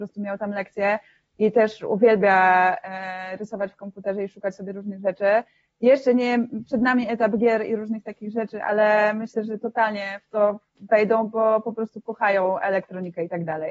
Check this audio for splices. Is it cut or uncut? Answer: uncut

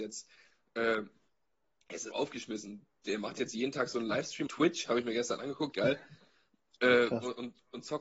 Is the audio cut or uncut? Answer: cut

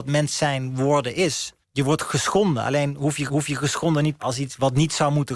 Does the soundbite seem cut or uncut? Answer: cut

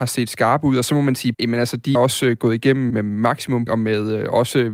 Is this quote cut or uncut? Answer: cut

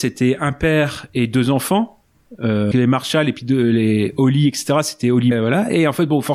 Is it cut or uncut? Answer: cut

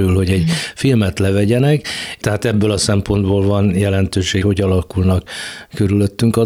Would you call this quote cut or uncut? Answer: cut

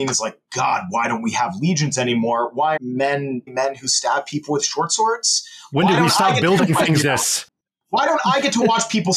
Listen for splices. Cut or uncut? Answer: cut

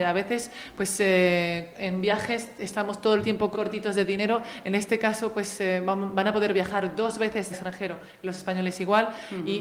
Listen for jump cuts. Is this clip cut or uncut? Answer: cut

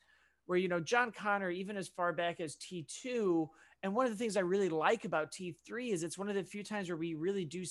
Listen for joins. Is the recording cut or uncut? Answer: uncut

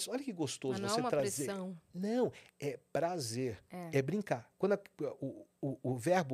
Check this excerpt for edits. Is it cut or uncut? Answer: uncut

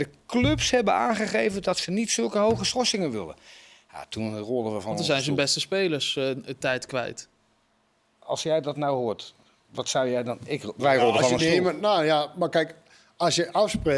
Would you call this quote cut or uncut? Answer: uncut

